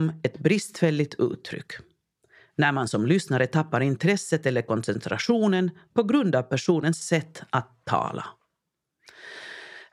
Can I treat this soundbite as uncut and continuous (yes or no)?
yes